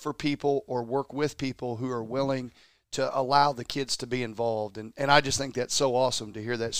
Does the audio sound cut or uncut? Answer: uncut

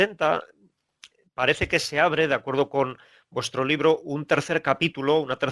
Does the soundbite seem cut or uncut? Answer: uncut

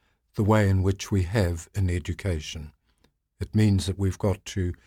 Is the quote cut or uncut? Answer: uncut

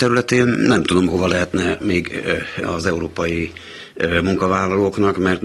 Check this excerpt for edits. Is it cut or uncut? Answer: cut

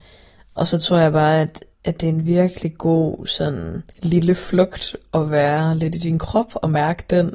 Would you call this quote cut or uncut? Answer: cut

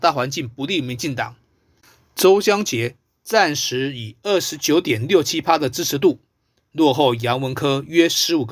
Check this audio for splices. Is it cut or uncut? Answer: uncut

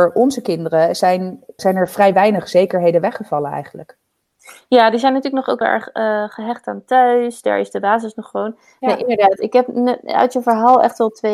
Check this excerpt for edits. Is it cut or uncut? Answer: cut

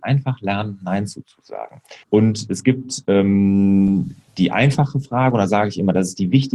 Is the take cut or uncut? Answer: cut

